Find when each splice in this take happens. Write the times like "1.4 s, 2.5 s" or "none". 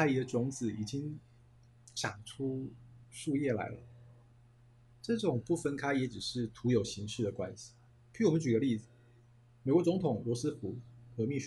7.9 s